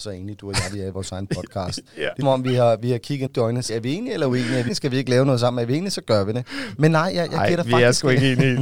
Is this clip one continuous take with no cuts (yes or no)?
no